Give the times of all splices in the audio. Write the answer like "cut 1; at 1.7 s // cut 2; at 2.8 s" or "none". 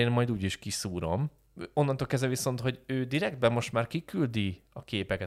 none